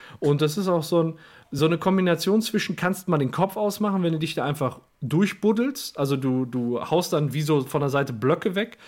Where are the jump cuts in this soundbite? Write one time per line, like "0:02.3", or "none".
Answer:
none